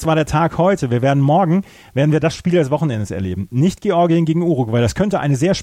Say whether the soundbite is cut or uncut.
uncut